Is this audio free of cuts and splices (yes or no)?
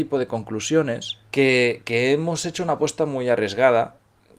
no